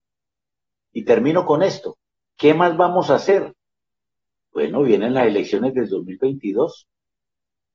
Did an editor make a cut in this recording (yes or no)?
no